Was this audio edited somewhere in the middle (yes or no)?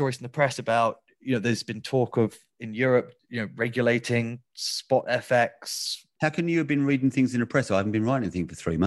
no